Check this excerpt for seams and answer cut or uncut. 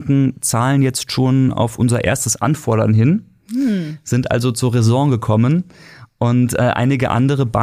uncut